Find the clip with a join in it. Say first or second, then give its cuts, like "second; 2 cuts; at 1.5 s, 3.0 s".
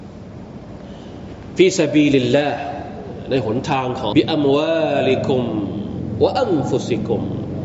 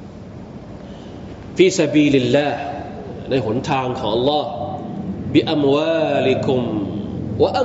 first; 1 cut; at 4.1 s